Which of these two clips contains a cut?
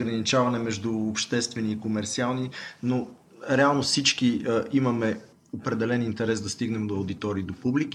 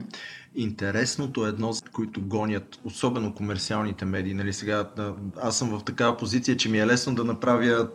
second; 1 cut; at 1.8 s

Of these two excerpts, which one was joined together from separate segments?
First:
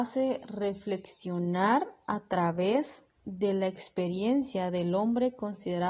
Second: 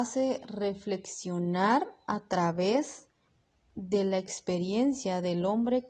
first; 1 cut; at 3.2 s

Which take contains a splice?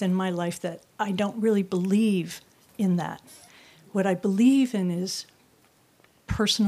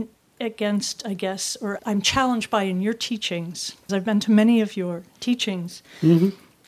second; 2 cuts; at 1.8 s, 3.9 s

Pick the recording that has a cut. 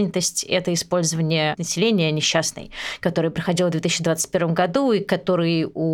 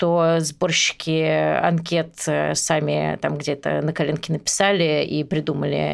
first; 1 cut; at 1.6 s

